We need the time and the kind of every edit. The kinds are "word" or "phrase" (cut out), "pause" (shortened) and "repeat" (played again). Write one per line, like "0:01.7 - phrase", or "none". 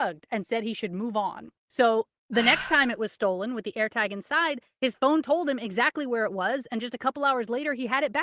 0:01.6 - pause